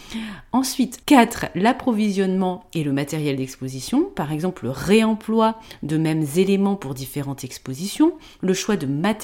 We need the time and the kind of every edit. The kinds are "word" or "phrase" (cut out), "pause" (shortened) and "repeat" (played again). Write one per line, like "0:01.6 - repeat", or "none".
0:01.0 - pause